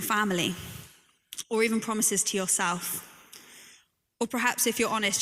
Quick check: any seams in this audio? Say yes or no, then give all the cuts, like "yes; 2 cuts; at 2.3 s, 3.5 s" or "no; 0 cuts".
no; 0 cuts